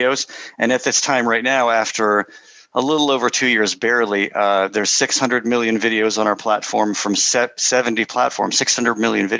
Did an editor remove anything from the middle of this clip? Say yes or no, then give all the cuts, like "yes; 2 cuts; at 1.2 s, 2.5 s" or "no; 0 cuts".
no; 0 cuts